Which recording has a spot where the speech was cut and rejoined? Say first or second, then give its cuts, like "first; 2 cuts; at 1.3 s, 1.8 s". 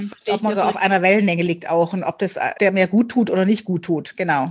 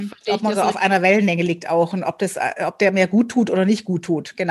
first; 1 cut; at 2.6 s